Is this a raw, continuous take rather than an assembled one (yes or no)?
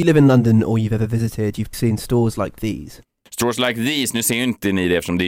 no